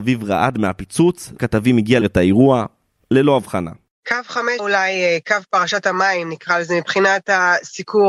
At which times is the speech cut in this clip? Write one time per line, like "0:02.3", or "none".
0:01.4
0:02.0
0:04.6